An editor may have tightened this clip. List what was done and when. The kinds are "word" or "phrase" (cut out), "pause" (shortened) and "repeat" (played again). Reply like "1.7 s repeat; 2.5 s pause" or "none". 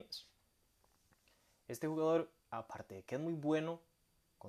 2.4 s pause